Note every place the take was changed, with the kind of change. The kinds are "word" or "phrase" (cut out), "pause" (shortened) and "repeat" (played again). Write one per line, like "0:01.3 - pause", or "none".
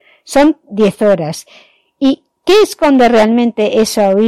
none